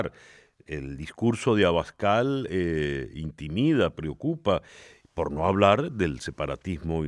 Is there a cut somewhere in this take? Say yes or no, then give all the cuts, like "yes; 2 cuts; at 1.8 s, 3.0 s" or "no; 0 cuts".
no; 0 cuts